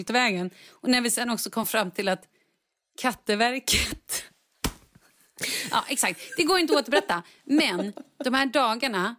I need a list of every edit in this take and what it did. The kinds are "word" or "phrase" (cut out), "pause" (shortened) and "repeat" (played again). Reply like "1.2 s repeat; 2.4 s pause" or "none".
none

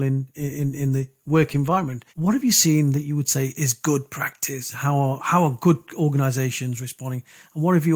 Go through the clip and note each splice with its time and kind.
2.1 s pause; 4.7 s word

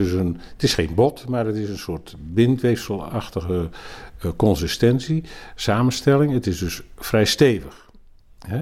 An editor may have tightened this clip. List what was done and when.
none

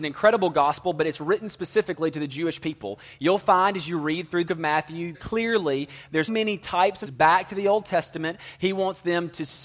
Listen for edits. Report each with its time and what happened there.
4.5 s word; 5.1 s word; 6.3 s word; 7.0 s word

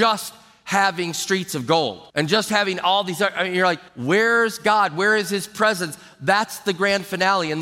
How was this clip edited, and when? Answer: 2.1 s pause; 3.9 s pause

